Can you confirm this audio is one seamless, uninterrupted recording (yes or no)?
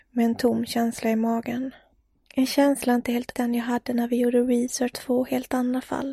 no